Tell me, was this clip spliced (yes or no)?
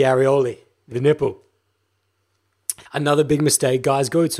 yes